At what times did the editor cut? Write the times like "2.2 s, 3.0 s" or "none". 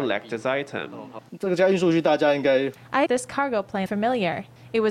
3.1 s, 3.9 s